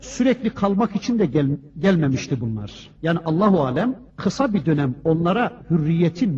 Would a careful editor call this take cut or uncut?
cut